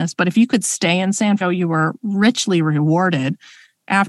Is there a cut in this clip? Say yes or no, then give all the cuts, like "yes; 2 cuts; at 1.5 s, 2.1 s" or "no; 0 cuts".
yes; 1 cut; at 1.4 s